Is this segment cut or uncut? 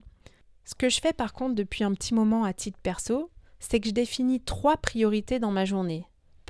uncut